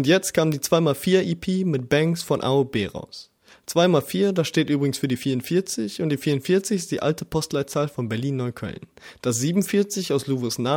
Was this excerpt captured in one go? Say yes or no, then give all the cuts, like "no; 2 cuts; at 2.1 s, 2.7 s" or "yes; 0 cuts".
yes; 0 cuts